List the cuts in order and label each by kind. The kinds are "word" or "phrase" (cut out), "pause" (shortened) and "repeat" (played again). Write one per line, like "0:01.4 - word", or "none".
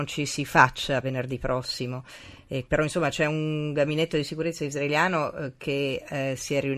0:01.0 - word
0:02.7 - word